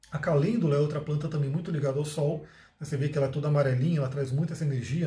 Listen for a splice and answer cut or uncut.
uncut